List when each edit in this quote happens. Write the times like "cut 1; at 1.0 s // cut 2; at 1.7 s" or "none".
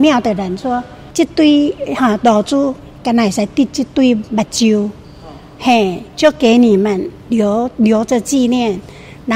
none